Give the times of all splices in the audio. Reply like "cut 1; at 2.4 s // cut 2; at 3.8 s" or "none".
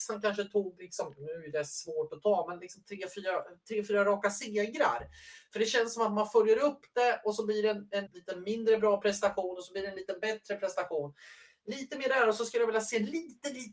cut 1; at 8.1 s